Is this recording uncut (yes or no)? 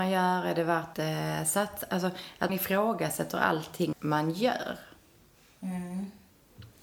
no